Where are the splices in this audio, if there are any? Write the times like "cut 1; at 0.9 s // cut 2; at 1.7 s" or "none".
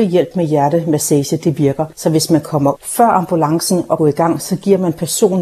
cut 1; at 1.9 s // cut 2; at 2.8 s // cut 3; at 4.0 s